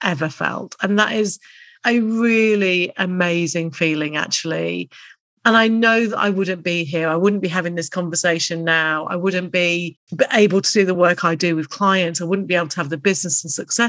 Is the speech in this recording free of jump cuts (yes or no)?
yes